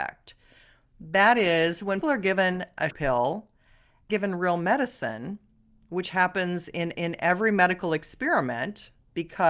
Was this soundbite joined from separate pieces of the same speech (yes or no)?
yes